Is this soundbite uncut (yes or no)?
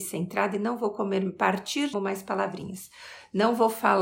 no